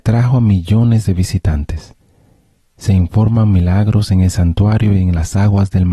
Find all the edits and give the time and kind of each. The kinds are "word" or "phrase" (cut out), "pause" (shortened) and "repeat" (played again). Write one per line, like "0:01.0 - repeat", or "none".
none

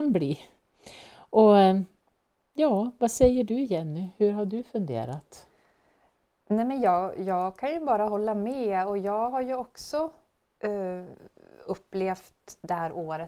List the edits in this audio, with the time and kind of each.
none

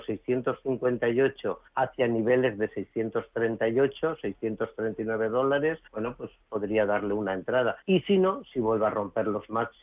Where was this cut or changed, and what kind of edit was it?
0:01.7 - pause
0:05.9 - pause
0:07.8 - pause

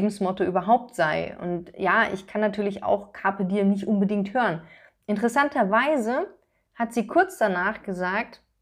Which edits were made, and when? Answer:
none

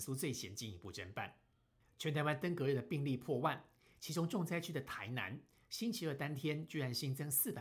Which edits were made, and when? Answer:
none

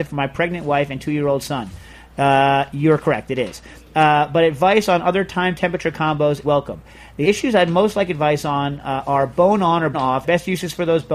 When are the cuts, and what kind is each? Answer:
0:06.4 - word
0:07.2 - word
0:09.9 - word
0:10.2 - word

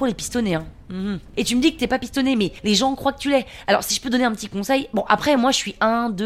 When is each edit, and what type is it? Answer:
none

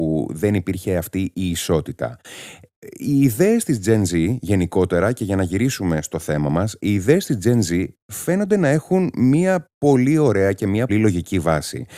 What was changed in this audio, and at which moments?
0:10.9 - word

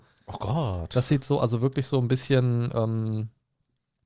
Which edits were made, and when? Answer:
none

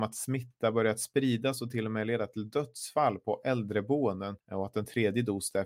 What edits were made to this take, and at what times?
0:04.4 - pause

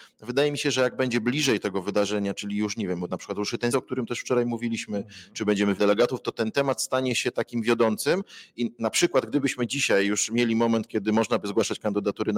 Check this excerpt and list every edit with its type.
0:03.7 - word
0:05.8 - phrase
0:08.5 - word

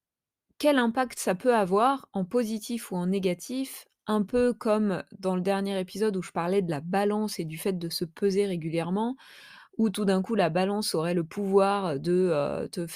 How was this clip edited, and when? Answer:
none

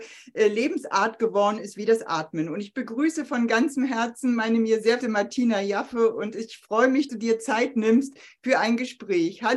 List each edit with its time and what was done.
0:05.0 - word
0:07.1 - word

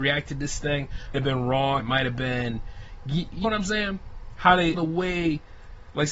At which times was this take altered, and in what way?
0:01.1 - word
0:01.8 - word
0:03.4 - word
0:04.7 - word

